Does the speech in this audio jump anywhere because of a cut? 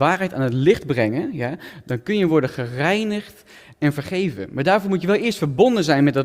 no; 0 cuts

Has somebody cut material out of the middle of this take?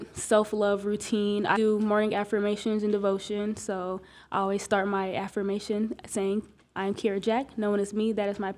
yes; 1 cut; at 1.5 s

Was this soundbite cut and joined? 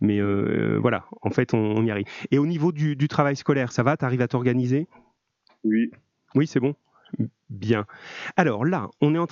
no; 0 cuts

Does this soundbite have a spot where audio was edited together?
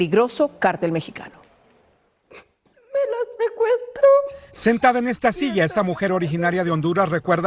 no; 0 cuts

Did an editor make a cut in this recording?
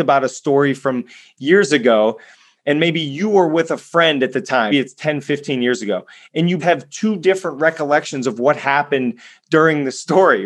yes; 2 cuts; at 4.7 s, 6.6 s

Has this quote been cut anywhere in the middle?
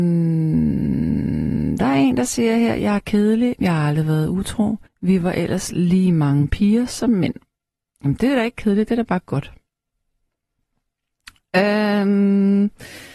yes; 1 cut; at 4.9 s

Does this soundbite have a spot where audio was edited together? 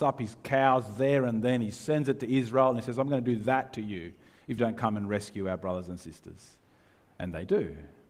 yes; 1 cut; at 4.6 s

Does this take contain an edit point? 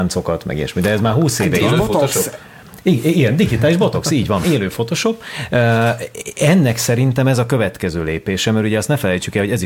yes; 2 cuts; at 1.6 s, 4.4 s

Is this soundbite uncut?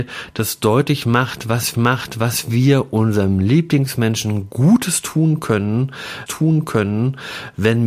no; 2 cuts; at 1.7 s, 6.3 s

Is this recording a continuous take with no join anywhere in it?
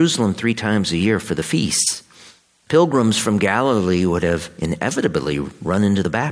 yes; 0 cuts

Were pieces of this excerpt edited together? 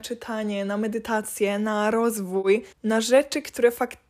yes; 1 cut; at 2.7 s

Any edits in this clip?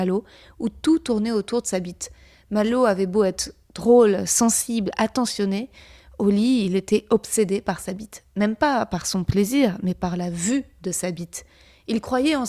no; 0 cuts

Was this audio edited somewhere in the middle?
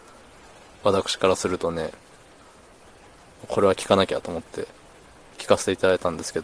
no; 0 cuts

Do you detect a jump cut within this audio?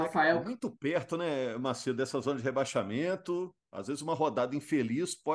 no; 0 cuts

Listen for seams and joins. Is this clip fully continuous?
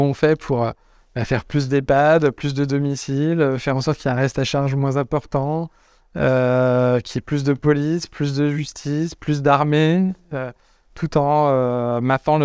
yes; 0 cuts

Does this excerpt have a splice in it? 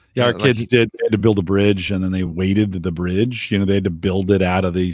no; 0 cuts

